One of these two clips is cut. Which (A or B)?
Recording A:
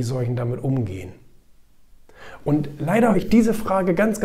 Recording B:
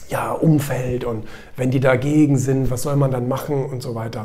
A